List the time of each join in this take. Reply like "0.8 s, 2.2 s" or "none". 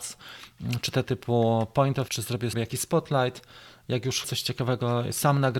1.0 s, 2.1 s, 2.5 s, 4.2 s